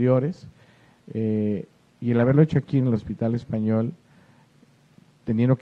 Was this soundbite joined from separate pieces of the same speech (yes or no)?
no